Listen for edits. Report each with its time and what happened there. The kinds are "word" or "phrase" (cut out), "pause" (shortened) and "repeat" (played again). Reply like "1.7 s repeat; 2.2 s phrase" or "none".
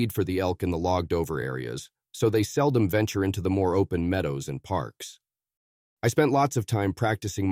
none